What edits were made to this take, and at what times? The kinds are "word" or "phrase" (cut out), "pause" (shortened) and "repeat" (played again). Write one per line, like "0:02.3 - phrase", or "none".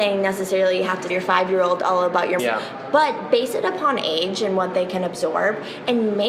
0:01.1 - word
0:02.4 - phrase